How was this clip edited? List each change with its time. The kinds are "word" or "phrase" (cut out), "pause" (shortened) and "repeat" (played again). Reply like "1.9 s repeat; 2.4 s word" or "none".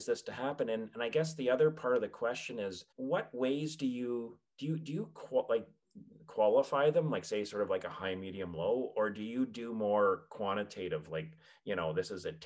2.9 s pause